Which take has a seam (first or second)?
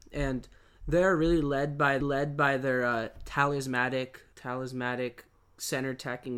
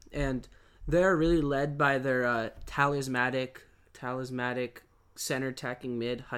first